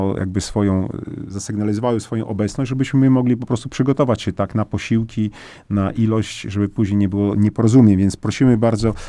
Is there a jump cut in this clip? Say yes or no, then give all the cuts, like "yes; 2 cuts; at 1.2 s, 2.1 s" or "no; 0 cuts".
no; 0 cuts